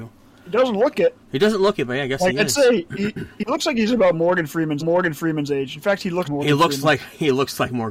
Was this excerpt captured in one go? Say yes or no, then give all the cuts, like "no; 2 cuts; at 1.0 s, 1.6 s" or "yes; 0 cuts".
no; 3 cuts; at 1.2 s, 4.8 s, 6.2 s